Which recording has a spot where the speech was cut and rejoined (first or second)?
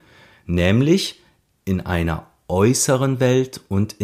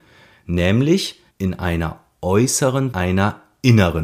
second